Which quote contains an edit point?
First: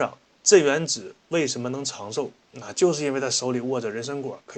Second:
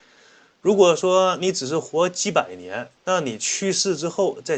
second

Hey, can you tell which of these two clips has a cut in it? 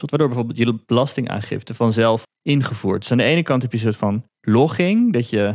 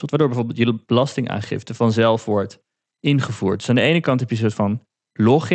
first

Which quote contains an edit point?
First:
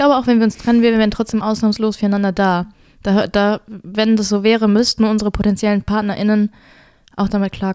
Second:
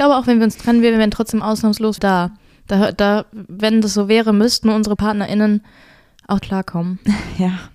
second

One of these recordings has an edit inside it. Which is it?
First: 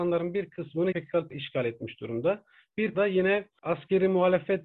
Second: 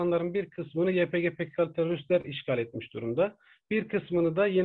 first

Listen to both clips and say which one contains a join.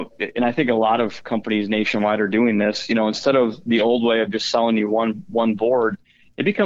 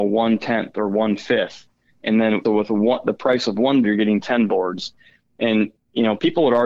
second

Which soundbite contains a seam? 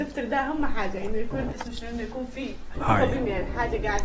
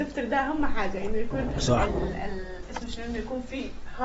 first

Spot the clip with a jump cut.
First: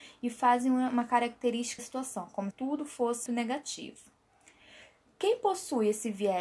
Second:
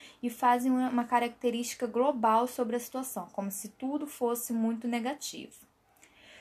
first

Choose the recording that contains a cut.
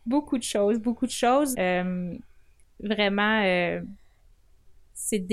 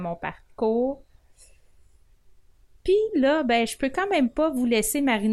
first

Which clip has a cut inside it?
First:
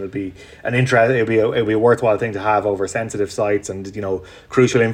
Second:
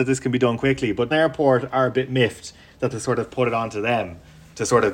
second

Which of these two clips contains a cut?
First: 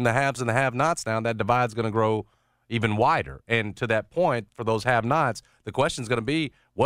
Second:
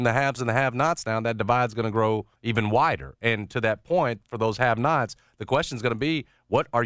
second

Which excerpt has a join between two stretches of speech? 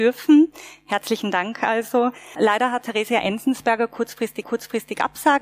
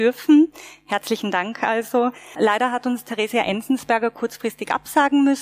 first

